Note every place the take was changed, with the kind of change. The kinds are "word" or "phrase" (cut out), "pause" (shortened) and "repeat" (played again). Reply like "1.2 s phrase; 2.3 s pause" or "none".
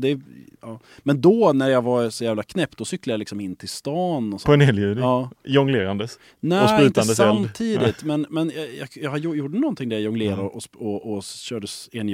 none